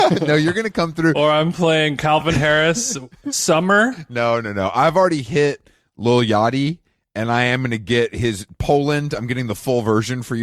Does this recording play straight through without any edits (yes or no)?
yes